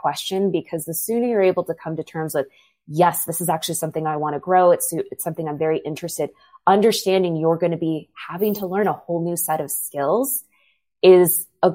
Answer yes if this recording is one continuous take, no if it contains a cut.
yes